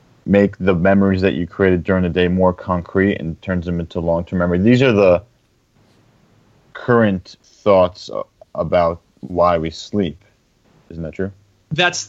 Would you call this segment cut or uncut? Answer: cut